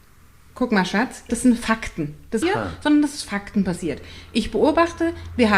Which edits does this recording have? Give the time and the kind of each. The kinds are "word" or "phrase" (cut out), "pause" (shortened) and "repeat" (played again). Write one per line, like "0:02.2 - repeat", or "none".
0:01.3 - phrase
0:02.4 - phrase